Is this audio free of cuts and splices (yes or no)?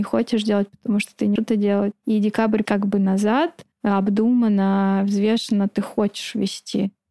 no